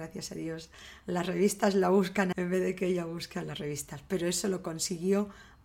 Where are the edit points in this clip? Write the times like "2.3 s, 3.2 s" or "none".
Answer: 2.3 s